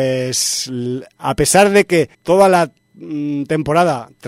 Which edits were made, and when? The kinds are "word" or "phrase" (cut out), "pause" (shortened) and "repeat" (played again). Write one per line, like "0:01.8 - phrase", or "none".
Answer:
0:02.1 - pause